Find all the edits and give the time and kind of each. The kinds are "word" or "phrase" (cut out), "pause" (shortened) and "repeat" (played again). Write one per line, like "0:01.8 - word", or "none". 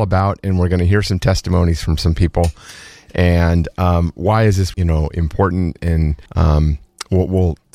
0:04.7 - word
0:06.3 - pause